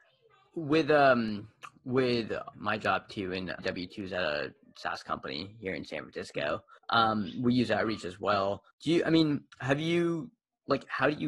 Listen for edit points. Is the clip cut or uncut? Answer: cut